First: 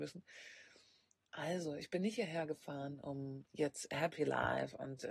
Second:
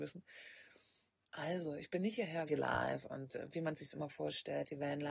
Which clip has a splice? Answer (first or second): second